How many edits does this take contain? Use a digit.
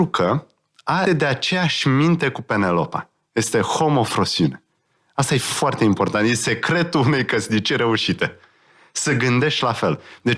1